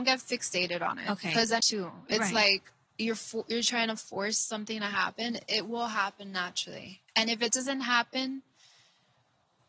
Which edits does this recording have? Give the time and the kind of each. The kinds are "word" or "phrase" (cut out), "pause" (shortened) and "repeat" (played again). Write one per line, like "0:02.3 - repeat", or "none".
0:01.6 - phrase